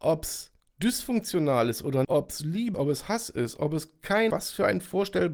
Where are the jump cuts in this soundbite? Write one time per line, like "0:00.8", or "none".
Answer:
0:02.0
0:02.7
0:04.3

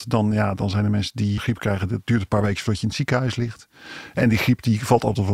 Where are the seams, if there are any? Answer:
0:01.4

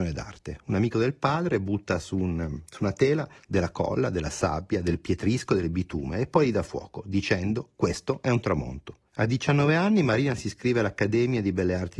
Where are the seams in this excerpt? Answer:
0:09.1

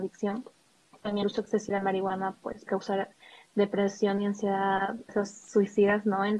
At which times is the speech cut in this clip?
0:01.2
0:01.7
0:02.7
0:05.1

